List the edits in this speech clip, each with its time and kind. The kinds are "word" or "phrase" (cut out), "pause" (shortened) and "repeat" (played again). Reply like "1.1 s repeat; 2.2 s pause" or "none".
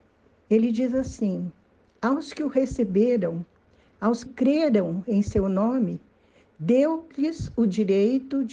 4.2 s word